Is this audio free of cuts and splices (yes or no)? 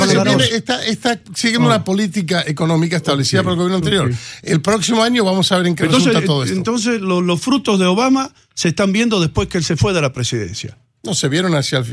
yes